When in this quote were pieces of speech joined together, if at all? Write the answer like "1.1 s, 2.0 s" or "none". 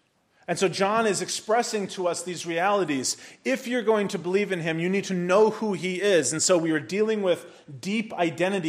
none